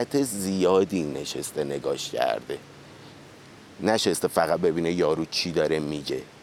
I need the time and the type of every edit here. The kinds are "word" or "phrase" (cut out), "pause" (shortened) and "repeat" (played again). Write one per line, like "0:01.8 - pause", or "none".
none